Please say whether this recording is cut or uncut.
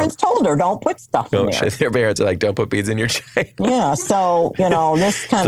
uncut